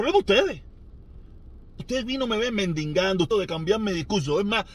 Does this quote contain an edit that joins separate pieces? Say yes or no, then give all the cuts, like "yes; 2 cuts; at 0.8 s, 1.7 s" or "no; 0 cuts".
yes; 2 cuts; at 1.8 s, 3.3 s